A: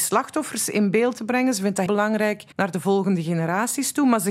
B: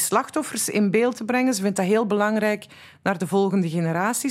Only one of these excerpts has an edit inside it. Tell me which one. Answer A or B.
A